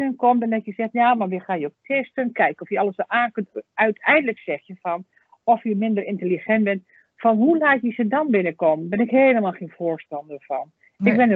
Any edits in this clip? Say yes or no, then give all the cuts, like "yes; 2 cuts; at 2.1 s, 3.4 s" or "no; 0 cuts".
no; 0 cuts